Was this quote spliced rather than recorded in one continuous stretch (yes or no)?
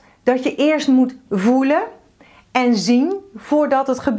no